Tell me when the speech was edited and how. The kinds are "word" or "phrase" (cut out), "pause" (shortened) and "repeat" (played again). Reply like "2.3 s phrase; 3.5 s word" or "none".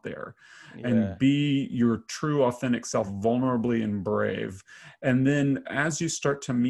none